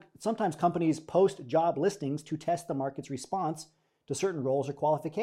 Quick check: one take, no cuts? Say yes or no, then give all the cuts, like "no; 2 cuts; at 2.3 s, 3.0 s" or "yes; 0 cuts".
yes; 0 cuts